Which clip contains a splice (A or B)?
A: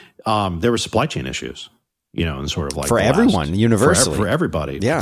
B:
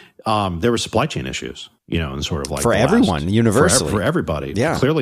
B